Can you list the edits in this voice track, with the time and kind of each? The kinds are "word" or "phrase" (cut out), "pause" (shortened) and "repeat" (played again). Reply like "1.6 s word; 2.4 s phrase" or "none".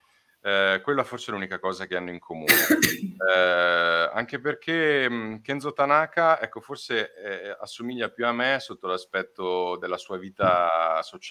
none